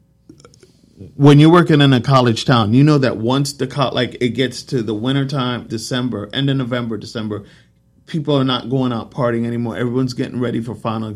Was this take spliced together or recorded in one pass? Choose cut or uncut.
cut